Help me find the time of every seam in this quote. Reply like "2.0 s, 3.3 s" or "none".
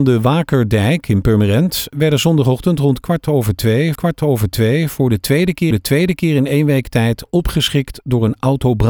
3.9 s, 5.7 s